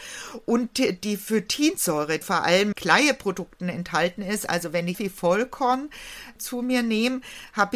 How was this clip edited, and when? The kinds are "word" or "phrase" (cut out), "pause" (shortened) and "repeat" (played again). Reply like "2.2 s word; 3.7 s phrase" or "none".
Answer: 2.2 s word; 2.7 s word; 4.9 s word